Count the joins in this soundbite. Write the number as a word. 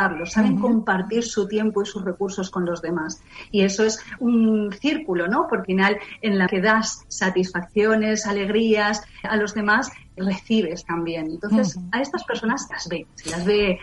six